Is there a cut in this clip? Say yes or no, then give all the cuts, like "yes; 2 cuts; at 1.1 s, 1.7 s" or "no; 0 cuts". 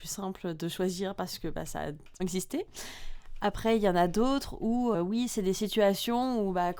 yes; 2 cuts; at 2.2 s, 4.9 s